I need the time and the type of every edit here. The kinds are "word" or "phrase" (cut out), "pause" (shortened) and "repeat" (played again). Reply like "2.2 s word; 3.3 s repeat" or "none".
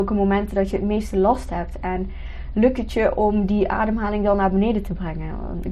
none